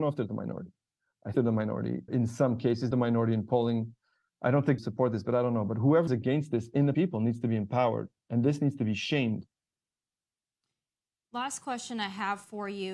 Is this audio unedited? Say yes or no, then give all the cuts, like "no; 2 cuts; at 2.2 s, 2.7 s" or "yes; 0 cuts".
no; 6 cuts; at 1.3 s, 2.1 s, 2.9 s, 4.8 s, 6.1 s, 6.9 s